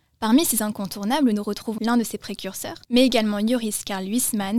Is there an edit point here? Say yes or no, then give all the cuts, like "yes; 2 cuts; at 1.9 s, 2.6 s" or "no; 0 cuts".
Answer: yes; 2 cuts; at 1.8 s, 2.8 s